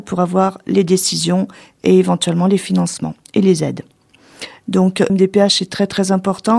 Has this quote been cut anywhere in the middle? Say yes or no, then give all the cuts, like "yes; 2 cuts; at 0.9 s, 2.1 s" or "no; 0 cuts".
yes; 1 cut; at 5.1 s